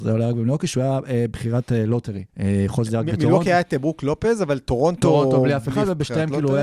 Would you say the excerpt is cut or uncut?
cut